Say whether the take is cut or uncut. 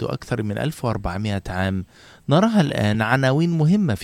uncut